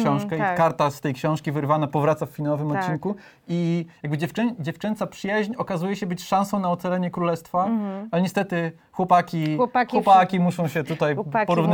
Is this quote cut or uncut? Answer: uncut